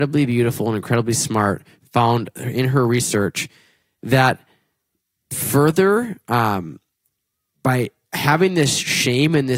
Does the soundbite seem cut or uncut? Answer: uncut